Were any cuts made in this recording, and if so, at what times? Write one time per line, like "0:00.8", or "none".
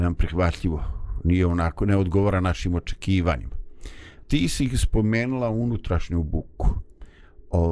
0:04.2